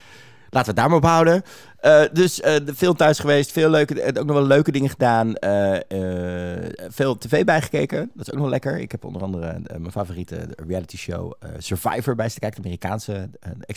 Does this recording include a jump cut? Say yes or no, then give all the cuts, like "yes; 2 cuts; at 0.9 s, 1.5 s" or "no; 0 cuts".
no; 0 cuts